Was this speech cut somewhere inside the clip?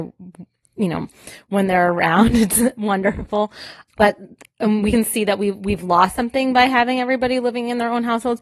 no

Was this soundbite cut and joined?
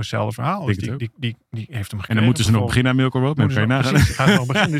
no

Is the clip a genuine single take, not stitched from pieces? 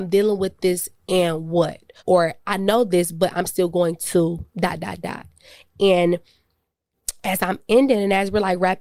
no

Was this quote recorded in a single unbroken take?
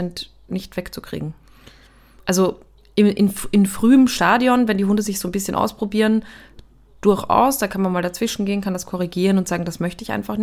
yes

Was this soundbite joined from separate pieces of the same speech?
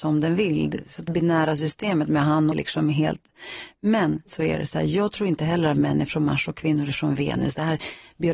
yes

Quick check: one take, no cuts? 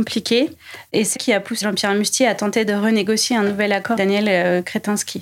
no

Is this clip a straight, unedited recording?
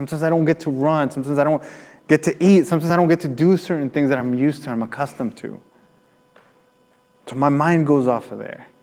yes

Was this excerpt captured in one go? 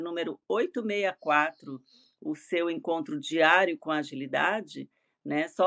yes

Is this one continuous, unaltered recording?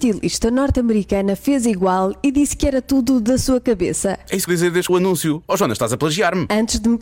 no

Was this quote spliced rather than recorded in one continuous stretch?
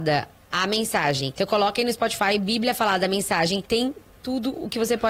no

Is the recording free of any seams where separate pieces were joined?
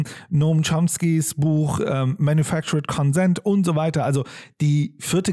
yes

